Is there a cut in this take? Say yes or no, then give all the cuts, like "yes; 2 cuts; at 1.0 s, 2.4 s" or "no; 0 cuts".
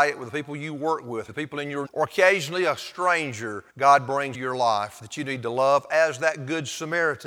yes; 4 cuts; at 1.3 s, 1.8 s, 3.7 s, 4.3 s